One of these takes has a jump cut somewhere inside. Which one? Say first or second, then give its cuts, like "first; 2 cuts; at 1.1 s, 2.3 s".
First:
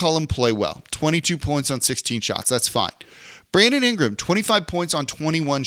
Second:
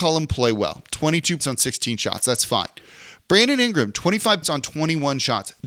second; 2 cuts; at 1.4 s, 4.4 s